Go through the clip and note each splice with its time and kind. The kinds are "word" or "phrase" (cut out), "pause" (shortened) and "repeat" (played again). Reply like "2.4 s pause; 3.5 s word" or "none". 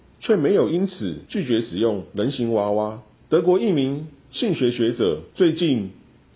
1.3 s pause; 3.2 s pause; 5.3 s pause